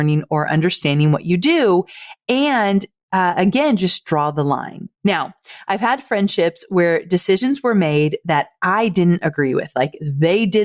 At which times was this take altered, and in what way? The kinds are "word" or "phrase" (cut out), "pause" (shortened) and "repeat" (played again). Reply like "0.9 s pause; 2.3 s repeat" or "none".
4.9 s pause